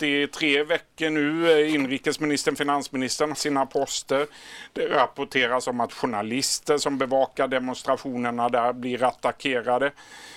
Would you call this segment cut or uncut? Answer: cut